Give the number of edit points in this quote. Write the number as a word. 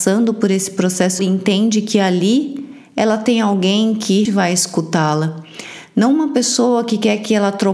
two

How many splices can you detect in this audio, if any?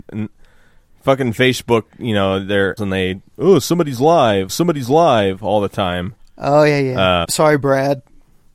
three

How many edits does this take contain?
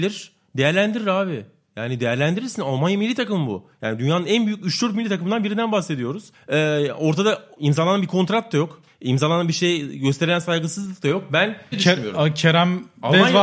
one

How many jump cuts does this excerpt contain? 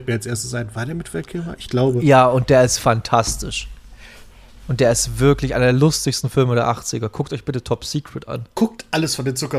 zero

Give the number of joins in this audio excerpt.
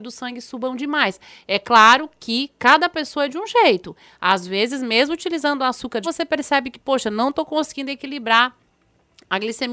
one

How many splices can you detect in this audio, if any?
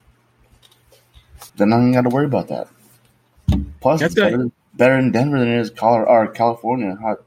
one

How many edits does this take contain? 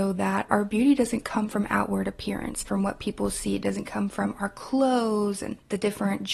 zero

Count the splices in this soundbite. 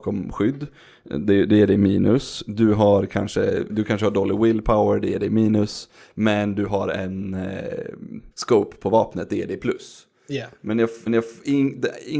three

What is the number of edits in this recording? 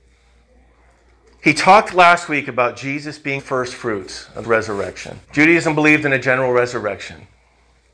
three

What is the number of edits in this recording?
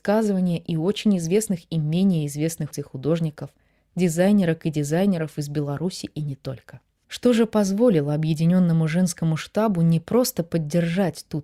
two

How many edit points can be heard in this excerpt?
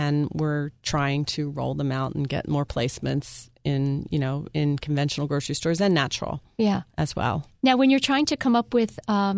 zero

